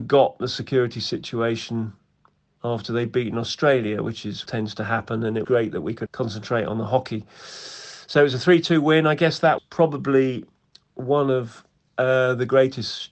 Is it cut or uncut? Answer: cut